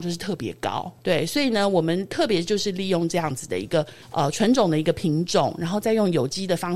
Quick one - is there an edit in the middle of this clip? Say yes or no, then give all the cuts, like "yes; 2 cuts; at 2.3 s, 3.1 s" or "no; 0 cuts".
yes; 2 cuts; at 1.0 s, 4.0 s